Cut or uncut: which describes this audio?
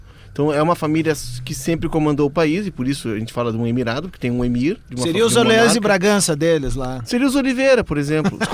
uncut